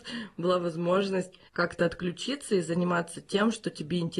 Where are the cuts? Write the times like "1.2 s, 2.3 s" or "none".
1.5 s